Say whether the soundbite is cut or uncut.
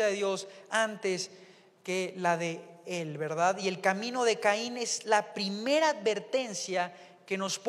uncut